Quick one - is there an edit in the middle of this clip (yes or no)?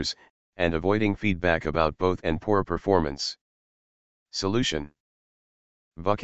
yes